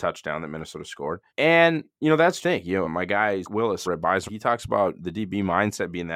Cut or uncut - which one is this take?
cut